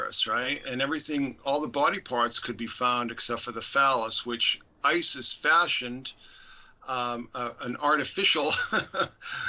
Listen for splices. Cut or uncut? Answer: uncut